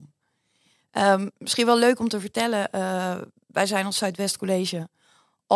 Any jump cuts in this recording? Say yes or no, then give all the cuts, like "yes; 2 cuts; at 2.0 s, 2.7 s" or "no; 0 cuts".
no; 0 cuts